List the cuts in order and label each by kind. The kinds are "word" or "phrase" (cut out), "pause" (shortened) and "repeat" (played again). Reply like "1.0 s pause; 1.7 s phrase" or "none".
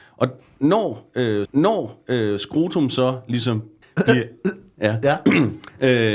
1.4 s repeat; 3.8 s pause